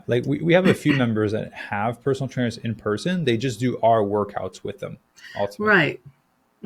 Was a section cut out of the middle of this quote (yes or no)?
no